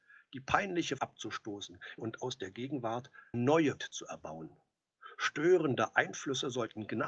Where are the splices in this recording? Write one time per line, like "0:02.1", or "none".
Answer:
0:01.0
0:02.0
0:03.3
0:03.8